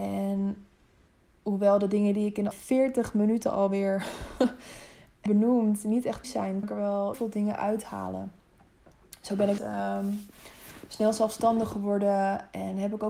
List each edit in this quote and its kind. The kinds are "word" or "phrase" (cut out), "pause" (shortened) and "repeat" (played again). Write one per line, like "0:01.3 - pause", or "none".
0:02.5 - word
0:05.3 - word
0:06.2 - word
0:06.6 - word
0:07.1 - word
0:09.6 - word